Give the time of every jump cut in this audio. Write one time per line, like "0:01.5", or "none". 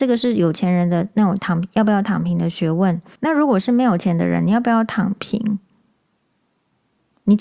0:03.2